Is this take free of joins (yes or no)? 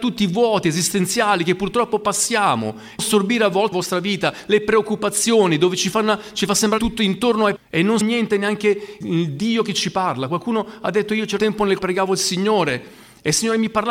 no